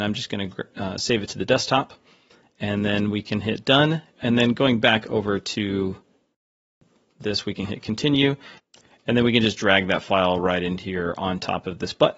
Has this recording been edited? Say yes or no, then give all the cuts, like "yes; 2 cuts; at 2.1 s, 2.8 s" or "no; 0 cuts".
no; 0 cuts